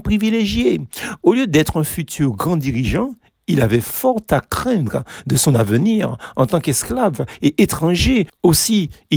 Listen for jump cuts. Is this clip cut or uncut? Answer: uncut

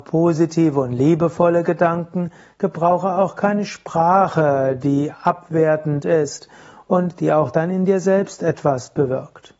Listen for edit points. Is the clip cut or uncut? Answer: uncut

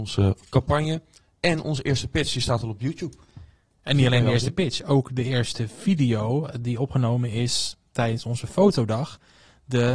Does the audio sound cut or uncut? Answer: uncut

